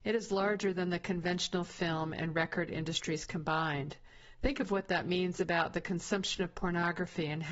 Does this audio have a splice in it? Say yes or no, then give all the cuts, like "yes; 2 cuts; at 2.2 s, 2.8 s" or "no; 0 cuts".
no; 0 cuts